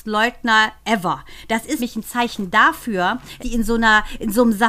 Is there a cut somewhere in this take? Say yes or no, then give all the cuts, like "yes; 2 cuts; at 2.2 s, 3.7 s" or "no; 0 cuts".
yes; 2 cuts; at 1.8 s, 3.4 s